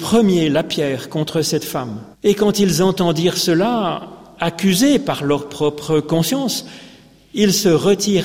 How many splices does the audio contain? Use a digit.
1